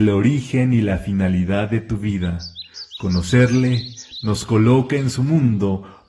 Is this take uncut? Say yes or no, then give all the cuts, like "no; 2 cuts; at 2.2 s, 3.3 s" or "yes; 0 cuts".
yes; 0 cuts